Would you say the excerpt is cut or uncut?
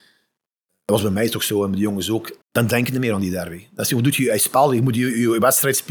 cut